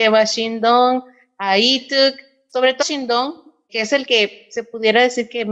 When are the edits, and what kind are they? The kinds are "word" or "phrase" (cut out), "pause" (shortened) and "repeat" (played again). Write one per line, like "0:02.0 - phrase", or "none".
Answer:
0:02.8 - word
0:03.7 - word